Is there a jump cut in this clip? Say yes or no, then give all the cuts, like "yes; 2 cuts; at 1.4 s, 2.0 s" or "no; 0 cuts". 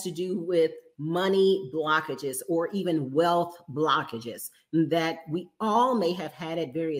no; 0 cuts